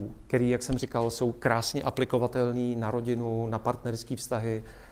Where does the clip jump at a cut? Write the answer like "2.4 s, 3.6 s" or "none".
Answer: none